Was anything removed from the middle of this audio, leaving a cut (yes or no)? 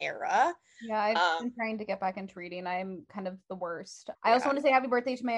yes